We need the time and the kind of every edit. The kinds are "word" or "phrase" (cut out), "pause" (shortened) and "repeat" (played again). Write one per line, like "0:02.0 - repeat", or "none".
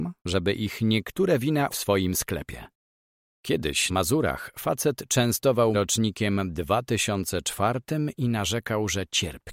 0:01.7 - word
0:03.9 - word
0:05.7 - word